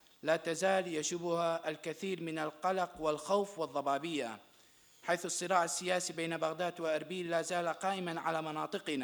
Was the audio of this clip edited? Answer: no; 0 cuts

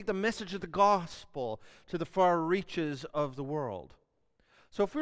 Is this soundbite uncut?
yes; 0 cuts

